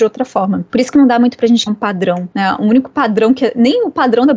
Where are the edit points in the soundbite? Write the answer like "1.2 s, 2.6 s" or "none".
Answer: 1.7 s